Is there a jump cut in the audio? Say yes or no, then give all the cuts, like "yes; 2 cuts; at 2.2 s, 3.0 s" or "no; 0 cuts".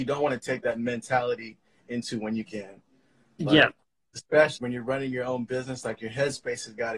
yes; 2 cuts; at 2.5 s, 4.6 s